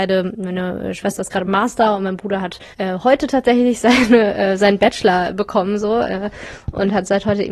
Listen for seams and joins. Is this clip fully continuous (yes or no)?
no